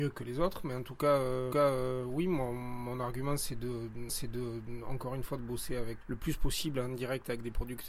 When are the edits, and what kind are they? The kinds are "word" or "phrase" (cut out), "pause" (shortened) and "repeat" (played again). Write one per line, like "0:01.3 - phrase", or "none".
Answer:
0:01.5 - repeat
0:04.1 - repeat
0:06.0 - word